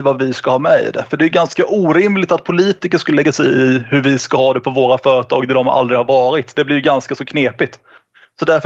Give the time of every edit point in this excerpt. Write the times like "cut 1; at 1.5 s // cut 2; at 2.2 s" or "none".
none